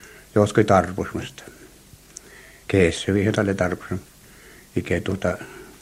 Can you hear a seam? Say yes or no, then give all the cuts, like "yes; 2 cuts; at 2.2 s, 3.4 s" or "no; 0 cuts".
no; 0 cuts